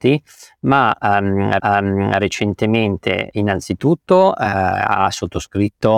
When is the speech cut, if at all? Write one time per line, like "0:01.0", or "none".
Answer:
0:01.6